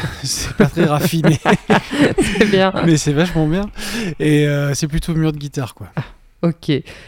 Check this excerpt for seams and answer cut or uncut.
cut